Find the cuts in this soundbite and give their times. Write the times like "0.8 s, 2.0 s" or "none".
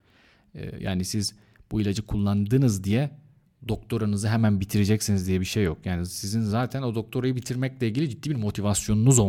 none